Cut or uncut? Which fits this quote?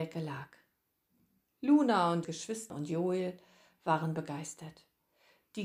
cut